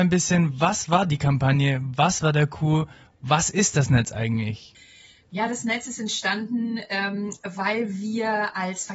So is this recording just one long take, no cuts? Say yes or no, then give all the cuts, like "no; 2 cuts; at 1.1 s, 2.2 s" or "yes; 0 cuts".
yes; 0 cuts